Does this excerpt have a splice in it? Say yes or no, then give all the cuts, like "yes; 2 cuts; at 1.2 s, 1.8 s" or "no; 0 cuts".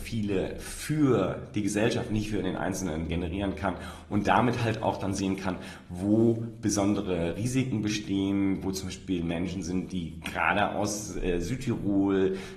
no; 0 cuts